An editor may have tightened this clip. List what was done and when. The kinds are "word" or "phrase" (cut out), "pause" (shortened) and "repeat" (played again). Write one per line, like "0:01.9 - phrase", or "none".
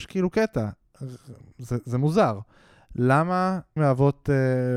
0:03.8 - word